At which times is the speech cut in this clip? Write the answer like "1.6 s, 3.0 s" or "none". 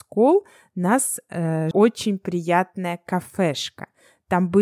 1.7 s